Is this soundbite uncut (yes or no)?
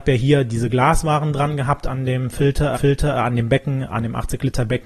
no